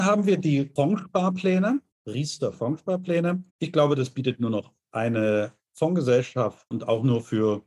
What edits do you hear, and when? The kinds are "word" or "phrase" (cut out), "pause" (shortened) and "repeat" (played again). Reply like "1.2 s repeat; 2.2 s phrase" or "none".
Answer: 3.5 s pause; 6.7 s word

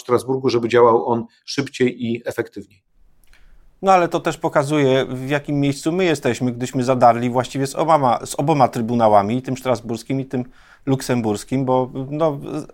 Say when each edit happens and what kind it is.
none

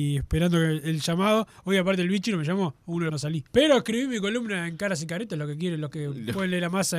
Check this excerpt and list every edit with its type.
3.1 s phrase; 3.5 s pause

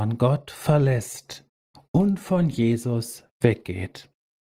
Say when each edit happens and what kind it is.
none

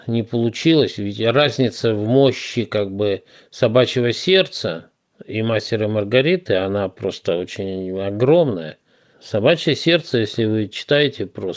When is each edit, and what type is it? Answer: none

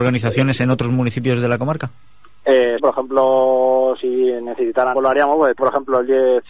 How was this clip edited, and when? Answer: 2.8 s word; 4.9 s phrase; 5.6 s word

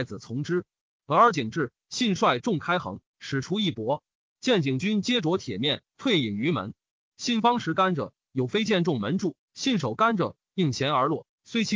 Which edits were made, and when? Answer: none

